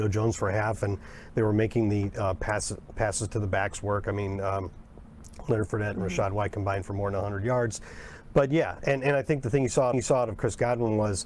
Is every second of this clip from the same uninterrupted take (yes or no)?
no